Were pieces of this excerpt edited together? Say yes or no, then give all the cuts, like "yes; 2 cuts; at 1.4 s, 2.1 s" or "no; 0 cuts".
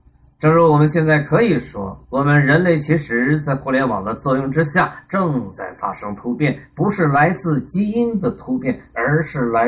yes; 1 cut; at 2.0 s